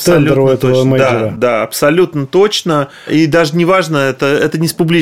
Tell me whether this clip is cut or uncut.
uncut